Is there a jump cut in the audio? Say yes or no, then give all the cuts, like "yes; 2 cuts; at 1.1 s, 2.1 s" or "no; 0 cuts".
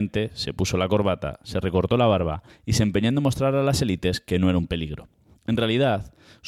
no; 0 cuts